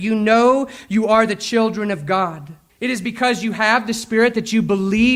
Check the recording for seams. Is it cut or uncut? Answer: cut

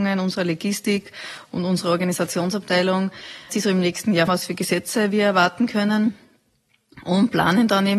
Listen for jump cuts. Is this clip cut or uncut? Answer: cut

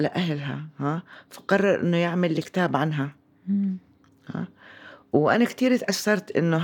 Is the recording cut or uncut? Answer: uncut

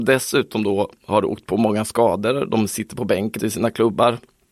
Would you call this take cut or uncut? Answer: cut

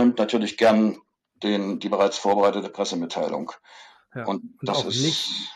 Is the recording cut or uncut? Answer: uncut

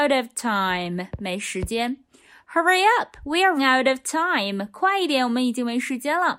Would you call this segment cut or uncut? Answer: cut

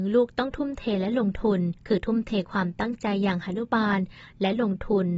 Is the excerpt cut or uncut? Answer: cut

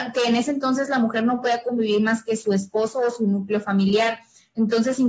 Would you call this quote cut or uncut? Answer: uncut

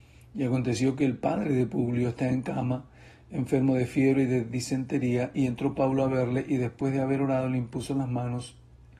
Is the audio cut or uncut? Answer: uncut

